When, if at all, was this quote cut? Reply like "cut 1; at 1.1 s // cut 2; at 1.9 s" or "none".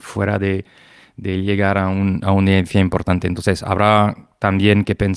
none